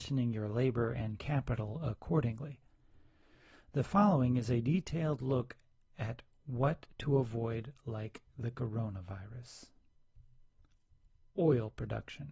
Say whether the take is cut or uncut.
uncut